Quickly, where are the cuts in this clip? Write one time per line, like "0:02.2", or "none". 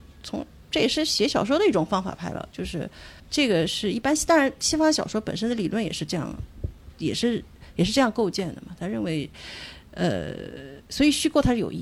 0:03.2
0:10.8